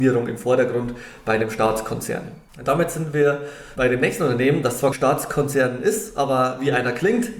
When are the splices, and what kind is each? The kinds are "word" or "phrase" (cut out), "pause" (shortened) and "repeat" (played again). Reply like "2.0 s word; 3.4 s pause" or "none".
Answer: 3.8 s word; 4.9 s word